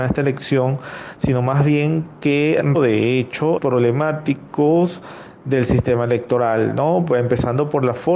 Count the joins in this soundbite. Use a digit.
2